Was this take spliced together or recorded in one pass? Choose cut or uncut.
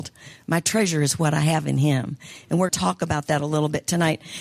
cut